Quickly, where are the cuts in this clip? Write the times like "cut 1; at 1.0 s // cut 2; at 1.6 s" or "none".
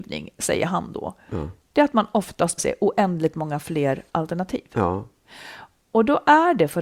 cut 1; at 2.6 s // cut 2; at 4.1 s